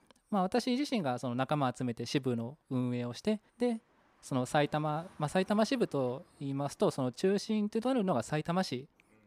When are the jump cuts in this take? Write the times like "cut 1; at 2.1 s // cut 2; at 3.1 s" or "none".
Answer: cut 1; at 2.6 s // cut 2; at 3.5 s // cut 3; at 6.3 s